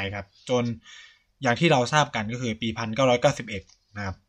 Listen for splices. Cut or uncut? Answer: uncut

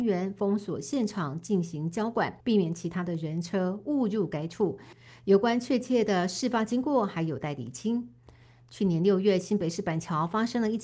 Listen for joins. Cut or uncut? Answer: cut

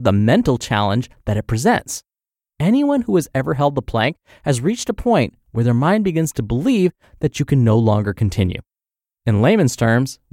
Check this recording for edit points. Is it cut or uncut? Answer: uncut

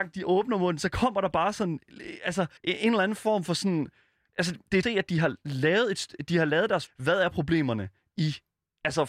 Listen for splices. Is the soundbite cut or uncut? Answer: cut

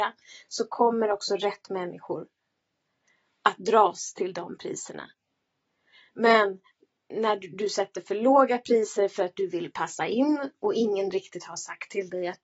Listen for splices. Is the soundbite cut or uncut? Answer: uncut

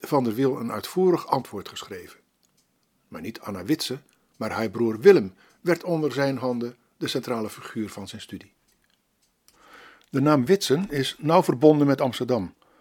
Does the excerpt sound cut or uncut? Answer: uncut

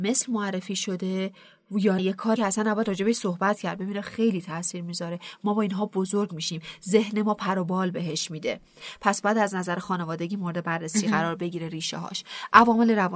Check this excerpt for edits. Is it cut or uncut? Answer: cut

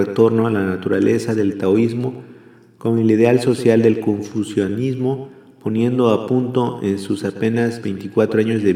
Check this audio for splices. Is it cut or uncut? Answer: uncut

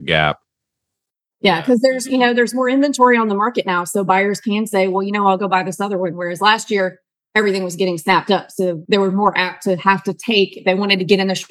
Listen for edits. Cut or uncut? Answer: uncut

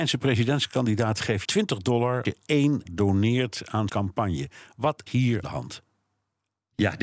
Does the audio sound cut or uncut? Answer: cut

